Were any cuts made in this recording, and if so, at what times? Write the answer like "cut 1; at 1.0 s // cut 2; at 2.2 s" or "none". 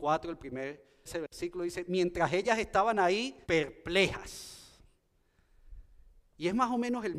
cut 1; at 1.1 s // cut 2; at 3.4 s